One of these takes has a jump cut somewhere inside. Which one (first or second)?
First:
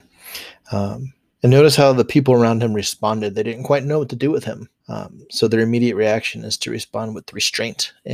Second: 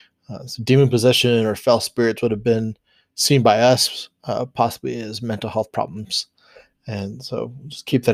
first